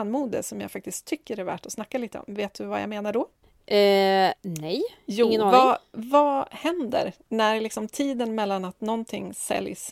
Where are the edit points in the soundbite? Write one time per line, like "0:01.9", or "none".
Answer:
none